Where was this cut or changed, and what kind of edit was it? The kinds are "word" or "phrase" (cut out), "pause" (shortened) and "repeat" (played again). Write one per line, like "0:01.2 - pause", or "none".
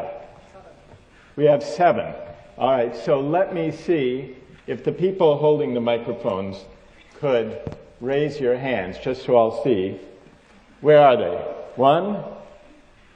none